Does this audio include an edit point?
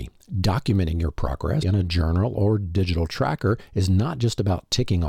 yes; 1 cut; at 1.6 s

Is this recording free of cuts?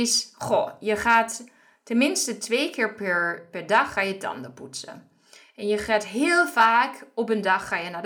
yes; 0 cuts

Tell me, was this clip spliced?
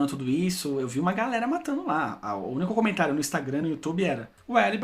no; 0 cuts

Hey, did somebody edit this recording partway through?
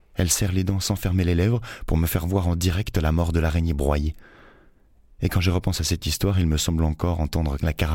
no; 0 cuts

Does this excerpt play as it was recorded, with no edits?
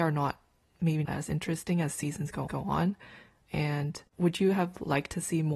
no; 3 cuts; at 1.1 s, 2.5 s, 4.1 s

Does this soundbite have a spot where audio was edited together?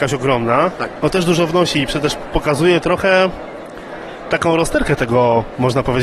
no; 0 cuts

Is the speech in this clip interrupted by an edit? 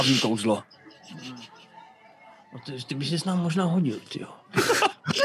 no; 0 cuts

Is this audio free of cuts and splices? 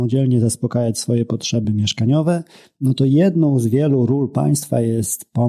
yes; 0 cuts

